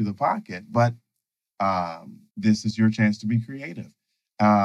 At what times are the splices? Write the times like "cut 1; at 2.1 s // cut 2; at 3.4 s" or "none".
cut 1; at 2.3 s